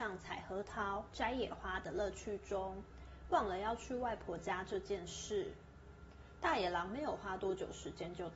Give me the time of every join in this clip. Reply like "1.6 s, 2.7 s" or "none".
1.1 s